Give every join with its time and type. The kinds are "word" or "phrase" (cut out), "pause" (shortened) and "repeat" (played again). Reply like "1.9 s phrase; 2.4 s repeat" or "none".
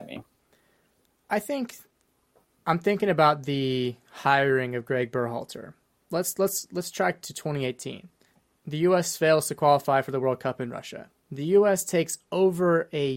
7.2 s word; 11.2 s pause